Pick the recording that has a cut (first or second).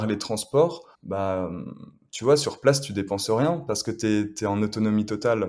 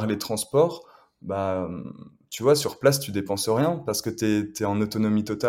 first